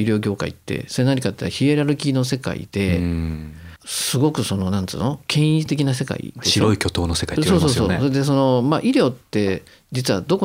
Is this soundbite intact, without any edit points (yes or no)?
no